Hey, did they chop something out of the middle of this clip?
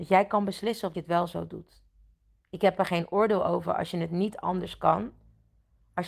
yes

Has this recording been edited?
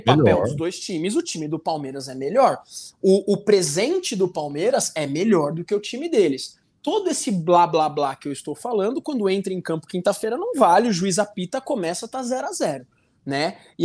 no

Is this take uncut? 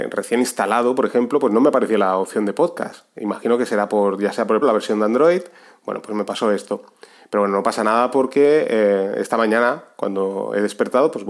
no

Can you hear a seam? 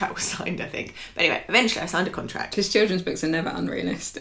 no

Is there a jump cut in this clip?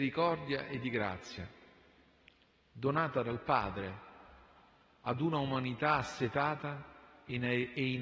no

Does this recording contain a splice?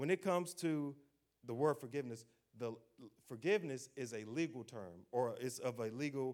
no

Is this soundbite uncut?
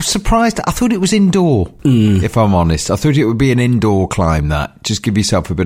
no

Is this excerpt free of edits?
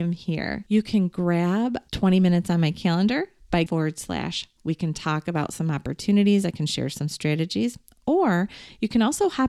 no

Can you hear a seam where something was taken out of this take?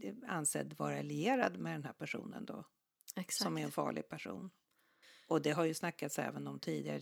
yes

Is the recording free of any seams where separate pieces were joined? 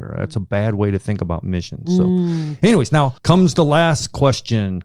no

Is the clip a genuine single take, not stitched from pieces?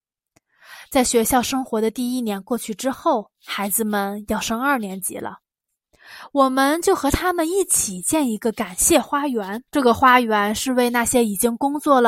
no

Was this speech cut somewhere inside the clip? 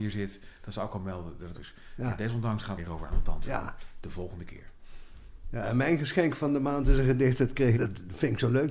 yes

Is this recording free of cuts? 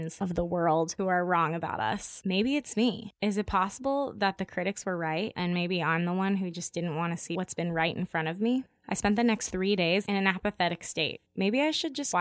yes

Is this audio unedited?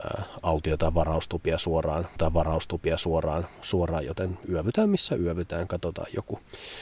no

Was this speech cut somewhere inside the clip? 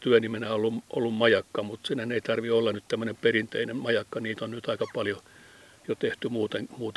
no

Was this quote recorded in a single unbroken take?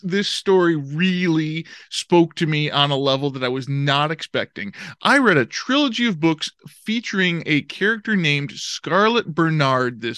yes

